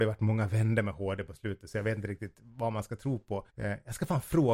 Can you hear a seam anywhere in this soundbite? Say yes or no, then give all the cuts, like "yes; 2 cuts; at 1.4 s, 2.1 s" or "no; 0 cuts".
yes; 1 cut; at 3.5 s